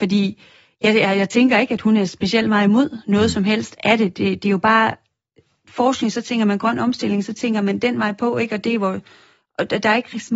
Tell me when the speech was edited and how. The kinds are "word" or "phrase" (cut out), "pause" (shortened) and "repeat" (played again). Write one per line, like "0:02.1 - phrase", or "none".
none